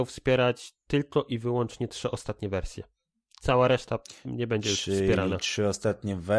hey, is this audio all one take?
yes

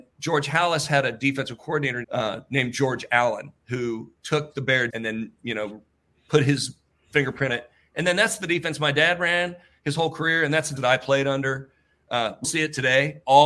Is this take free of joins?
no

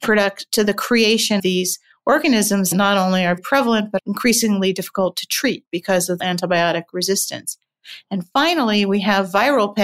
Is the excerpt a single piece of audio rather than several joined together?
no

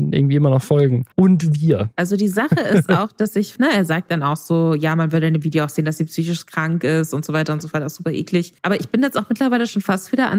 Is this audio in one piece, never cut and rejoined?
no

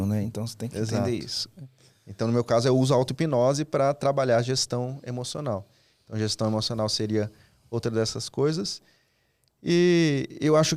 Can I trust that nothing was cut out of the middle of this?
yes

